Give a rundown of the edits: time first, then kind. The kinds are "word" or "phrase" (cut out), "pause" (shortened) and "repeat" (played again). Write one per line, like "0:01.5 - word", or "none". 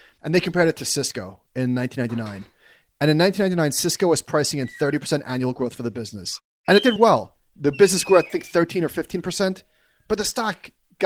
0:07.0 - word
0:08.3 - word